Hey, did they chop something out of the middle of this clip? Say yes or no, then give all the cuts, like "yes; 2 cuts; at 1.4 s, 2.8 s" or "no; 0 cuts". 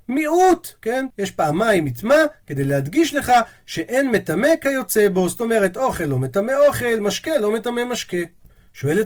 yes; 1 cut; at 1.1 s